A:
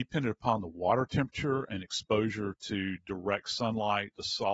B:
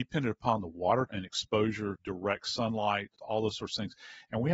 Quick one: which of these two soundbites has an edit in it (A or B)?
B